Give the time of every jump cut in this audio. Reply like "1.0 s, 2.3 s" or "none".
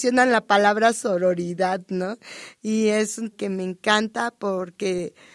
3.3 s